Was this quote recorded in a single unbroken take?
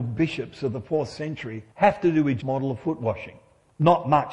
no; 2 cuts; at 1.7 s, 2.4 s

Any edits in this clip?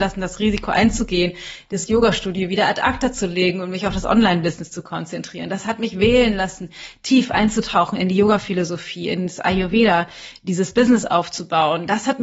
no; 0 cuts

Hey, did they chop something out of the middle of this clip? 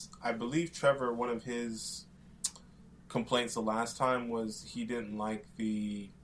no; 0 cuts

